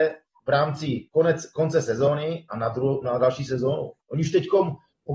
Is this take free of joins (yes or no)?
no